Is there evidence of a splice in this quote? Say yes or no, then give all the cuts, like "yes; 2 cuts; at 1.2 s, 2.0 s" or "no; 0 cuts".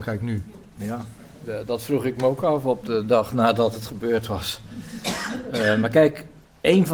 no; 0 cuts